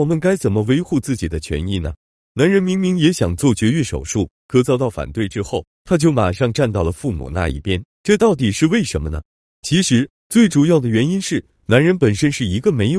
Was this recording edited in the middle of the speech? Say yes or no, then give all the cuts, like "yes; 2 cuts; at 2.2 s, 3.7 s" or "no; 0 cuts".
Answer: no; 0 cuts